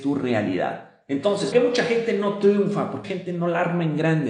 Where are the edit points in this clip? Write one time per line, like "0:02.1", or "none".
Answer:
0:01.5
0:03.0